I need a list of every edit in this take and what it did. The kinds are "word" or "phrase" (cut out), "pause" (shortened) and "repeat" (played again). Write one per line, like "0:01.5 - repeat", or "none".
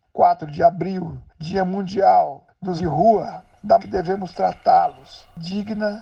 0:02.8 - word
0:03.8 - word